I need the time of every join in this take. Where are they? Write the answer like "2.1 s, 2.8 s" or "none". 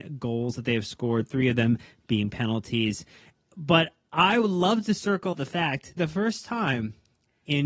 5.3 s, 6.0 s

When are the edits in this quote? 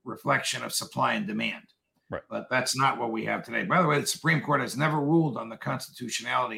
none

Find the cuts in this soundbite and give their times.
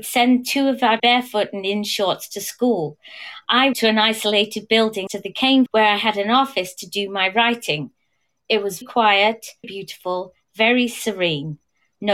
1.0 s, 3.7 s, 5.1 s, 5.7 s, 8.8 s, 9.6 s

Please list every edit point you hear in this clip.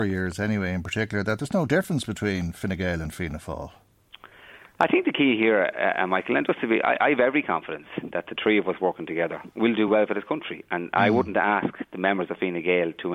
none

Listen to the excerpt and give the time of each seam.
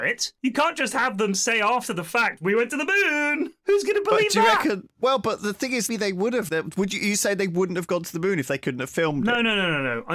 4.9 s, 5.9 s, 6.5 s

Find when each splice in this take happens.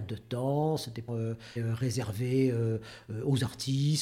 1.1 s, 1.6 s

